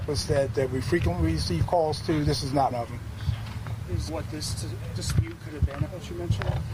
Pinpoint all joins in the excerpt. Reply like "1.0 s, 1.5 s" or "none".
2.7 s, 4.1 s, 5.8 s